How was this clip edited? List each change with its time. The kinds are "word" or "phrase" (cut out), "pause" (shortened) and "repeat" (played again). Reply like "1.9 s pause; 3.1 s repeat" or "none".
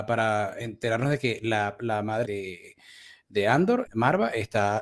2.2 s word; 3.9 s word